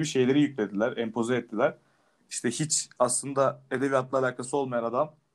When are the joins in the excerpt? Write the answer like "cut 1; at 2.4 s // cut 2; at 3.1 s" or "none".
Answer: none